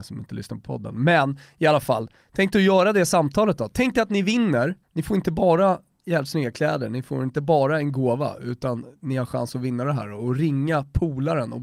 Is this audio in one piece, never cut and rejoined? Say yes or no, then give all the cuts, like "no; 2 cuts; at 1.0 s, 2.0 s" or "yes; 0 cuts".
no; 1 cut; at 4.8 s